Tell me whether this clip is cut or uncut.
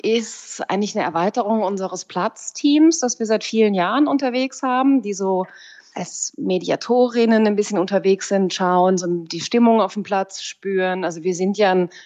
uncut